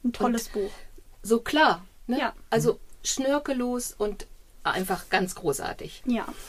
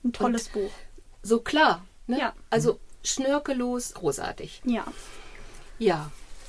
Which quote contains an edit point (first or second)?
second